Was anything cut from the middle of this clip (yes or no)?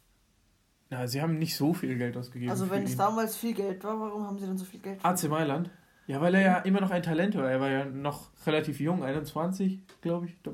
yes